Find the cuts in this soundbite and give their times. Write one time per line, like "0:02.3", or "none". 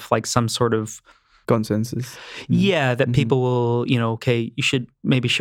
none